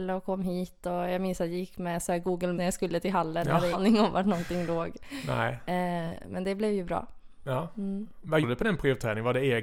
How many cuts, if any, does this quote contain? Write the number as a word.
three